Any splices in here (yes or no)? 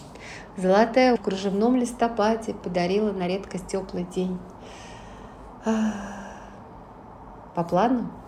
yes